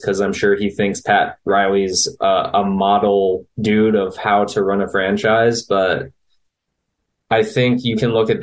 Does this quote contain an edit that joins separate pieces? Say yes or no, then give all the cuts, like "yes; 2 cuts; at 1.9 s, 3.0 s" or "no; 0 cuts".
yes; 1 cut; at 3.5 s